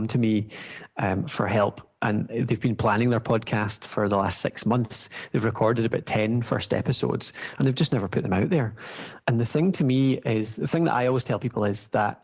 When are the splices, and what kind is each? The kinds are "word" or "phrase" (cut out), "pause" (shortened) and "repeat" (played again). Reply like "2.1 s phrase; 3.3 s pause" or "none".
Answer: 9.2 s pause